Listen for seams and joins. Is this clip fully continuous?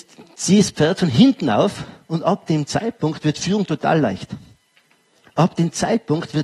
yes; 0 cuts

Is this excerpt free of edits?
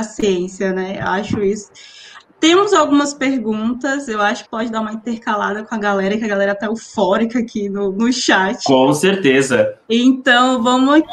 no; 1 cut; at 4.4 s

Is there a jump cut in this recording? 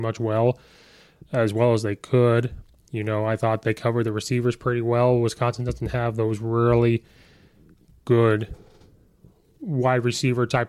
no; 0 cuts

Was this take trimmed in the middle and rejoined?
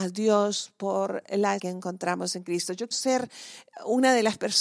yes; 2 cuts; at 1.6 s, 2.9 s

